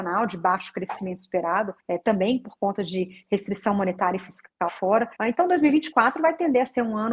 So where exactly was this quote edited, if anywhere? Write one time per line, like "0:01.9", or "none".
0:01.8
0:04.7
0:05.1